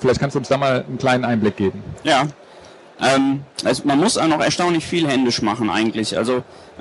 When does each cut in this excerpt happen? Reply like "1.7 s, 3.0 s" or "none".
3.5 s